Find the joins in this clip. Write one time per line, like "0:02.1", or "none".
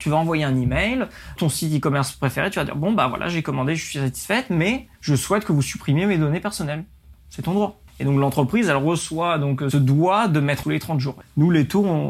0:01.4
0:04.9
0:07.9
0:09.7
0:10.6
0:11.2